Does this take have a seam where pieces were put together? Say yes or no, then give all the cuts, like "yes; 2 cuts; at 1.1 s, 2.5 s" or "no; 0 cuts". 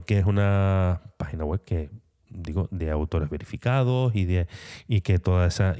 no; 0 cuts